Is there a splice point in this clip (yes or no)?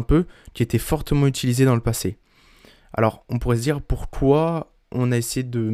no